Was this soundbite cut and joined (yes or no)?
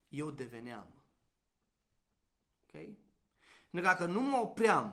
no